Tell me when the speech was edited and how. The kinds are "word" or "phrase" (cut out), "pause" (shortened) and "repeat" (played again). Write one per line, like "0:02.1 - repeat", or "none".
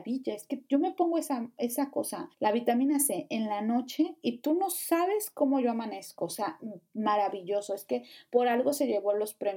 0:02.3 - pause